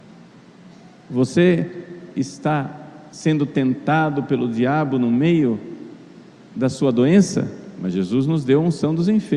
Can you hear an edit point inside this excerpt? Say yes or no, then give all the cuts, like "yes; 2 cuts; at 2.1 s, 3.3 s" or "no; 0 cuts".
no; 0 cuts